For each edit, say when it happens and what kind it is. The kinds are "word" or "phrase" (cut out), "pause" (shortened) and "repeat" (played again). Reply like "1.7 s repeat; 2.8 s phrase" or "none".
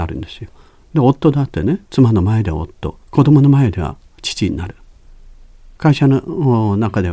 1.9 s pause; 3.0 s pause

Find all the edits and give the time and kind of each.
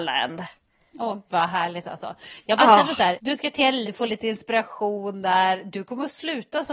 1.3 s word; 3.2 s word; 3.8 s word

